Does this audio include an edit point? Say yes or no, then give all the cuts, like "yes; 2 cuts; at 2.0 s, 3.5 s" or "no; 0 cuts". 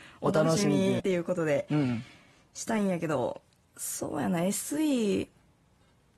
yes; 1 cut; at 1.0 s